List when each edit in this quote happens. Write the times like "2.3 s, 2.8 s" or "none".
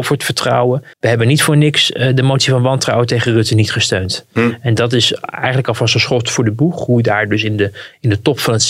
0.9 s

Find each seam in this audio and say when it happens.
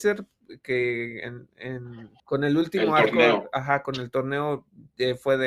2.2 s

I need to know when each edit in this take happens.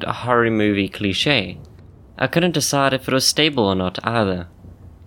none

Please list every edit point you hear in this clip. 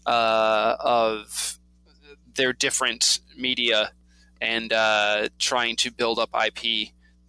none

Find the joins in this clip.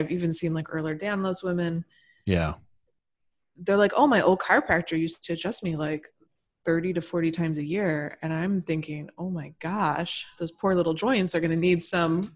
none

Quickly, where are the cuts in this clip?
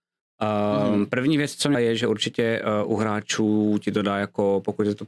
1.7 s

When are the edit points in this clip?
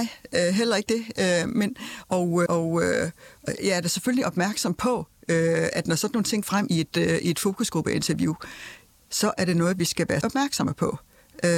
2.5 s, 3.6 s, 5.7 s, 6.4 s, 10.2 s

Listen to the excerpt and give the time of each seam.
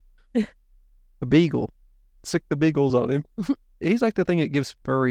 none

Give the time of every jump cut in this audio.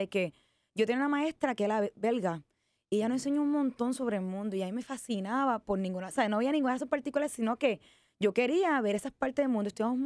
none

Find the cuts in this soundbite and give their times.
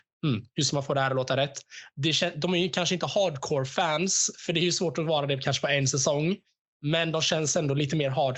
none

